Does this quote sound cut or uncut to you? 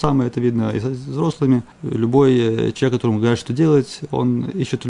cut